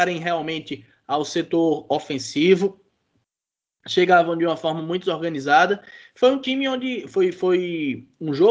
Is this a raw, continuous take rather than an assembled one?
yes; 0 cuts

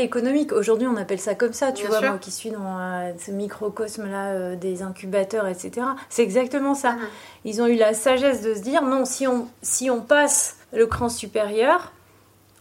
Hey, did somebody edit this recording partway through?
yes; 1 cut; at 10.6 s

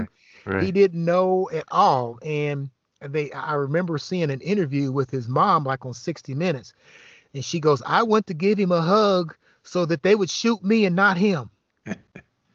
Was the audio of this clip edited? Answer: no; 0 cuts

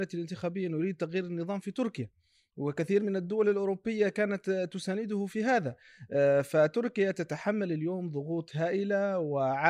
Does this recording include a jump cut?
no; 0 cuts

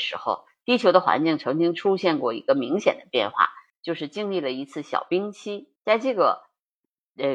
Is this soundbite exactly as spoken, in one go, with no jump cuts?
no; 1 cut; at 5.8 s

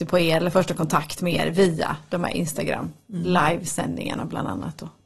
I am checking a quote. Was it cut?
no; 0 cuts

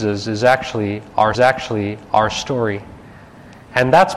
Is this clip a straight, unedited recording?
no; 1 cut; at 1.3 s

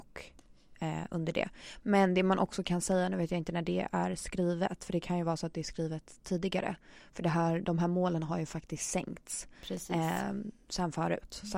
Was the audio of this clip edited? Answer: no; 0 cuts

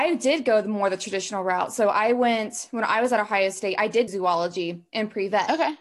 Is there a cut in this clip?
yes; 1 cut; at 4.1 s

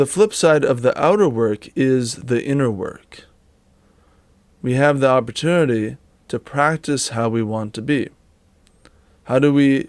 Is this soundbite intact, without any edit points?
yes; 0 cuts

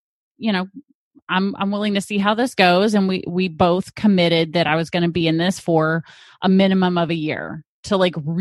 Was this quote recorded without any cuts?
yes; 0 cuts

